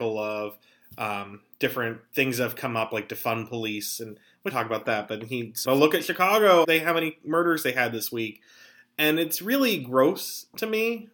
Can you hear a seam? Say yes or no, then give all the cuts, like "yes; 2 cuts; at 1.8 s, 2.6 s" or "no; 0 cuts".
yes; 3 cuts; at 4.5 s, 5.6 s, 6.6 s